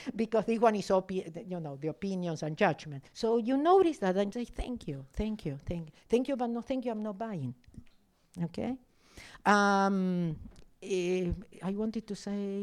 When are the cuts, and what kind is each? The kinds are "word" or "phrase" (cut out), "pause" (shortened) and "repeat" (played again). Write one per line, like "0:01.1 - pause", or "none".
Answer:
0:03.1 - pause
0:04.3 - word